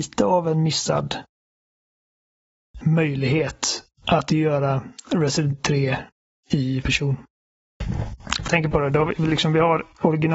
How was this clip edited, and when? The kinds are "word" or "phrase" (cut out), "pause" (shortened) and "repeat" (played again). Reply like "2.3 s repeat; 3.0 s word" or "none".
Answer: 2.8 s word; 4.3 s word; 5.5 s word; 6.8 s word; 8.5 s word